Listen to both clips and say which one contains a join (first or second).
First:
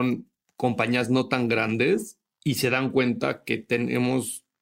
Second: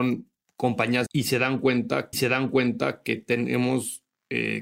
second